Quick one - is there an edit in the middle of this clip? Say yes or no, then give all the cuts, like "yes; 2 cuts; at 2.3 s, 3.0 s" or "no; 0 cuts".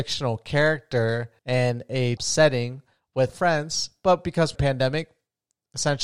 yes; 4 cuts; at 1.4 s, 2.2 s, 3.3 s, 4.6 s